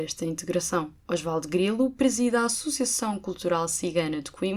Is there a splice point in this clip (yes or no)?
yes